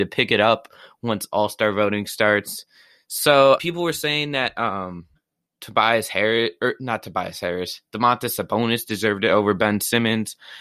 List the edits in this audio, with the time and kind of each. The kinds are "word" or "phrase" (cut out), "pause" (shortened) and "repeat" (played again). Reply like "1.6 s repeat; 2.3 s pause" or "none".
3.6 s word; 5.2 s pause